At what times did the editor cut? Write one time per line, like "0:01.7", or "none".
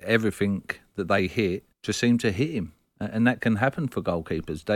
0:01.7